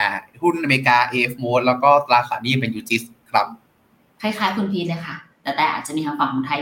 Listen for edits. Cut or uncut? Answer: uncut